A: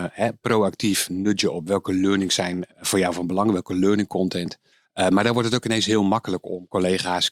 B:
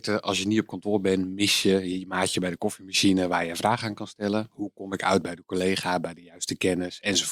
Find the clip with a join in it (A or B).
A